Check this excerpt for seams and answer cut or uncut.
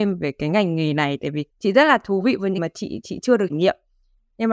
cut